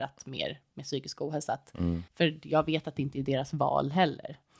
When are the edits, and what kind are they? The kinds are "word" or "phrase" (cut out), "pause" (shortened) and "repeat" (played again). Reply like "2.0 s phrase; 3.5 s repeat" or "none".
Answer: 2.1 s pause